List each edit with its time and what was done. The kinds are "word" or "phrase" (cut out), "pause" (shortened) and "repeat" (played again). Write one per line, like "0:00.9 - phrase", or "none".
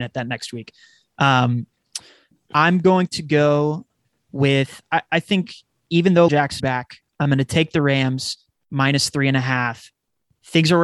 0:06.3 - word
0:06.6 - phrase